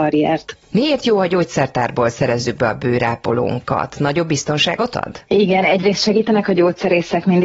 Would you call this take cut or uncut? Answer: uncut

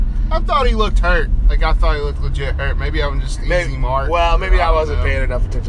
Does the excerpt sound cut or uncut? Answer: uncut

